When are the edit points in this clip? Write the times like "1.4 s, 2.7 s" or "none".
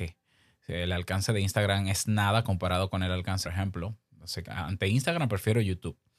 3.4 s, 4.4 s

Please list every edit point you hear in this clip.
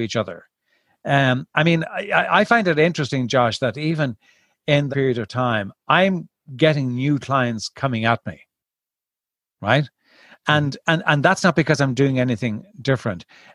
4.9 s

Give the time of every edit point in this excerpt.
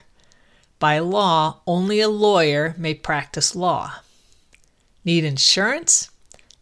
none

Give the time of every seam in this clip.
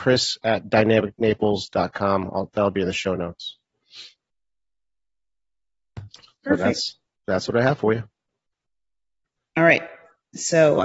none

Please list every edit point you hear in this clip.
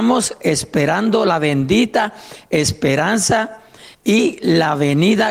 3.9 s

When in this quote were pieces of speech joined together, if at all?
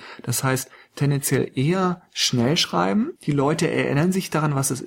3.2 s

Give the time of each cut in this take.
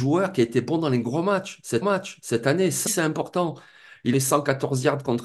1.8 s, 2.9 s, 4.1 s

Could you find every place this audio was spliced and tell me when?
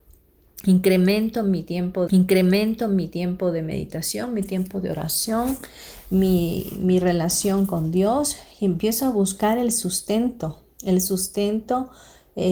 2.1 s

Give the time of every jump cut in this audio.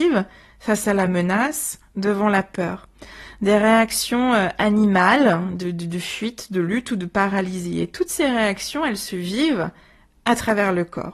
none

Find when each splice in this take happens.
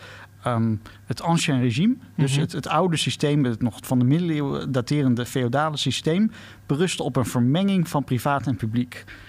none

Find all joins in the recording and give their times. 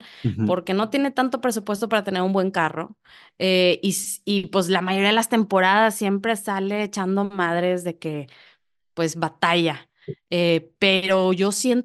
none

